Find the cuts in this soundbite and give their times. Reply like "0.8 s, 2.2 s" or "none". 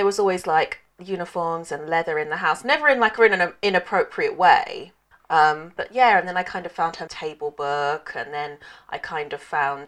3.2 s, 5.1 s, 7.1 s